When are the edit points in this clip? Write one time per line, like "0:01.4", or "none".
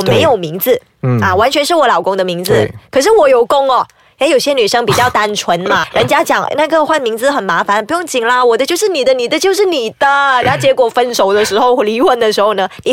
0:05.8
0:06.5